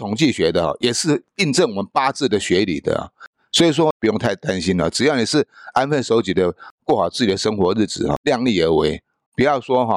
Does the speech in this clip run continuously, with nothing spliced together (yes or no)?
yes